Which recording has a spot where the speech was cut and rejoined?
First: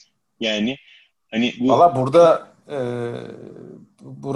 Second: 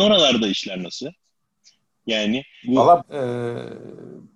second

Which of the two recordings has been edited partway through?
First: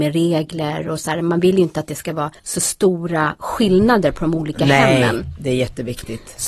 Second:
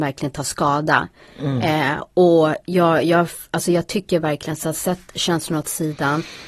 first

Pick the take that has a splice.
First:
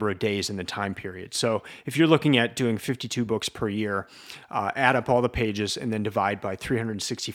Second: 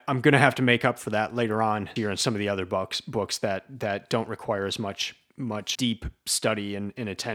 second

